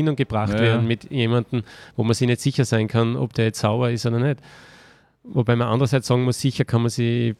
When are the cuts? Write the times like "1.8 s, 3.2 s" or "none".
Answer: none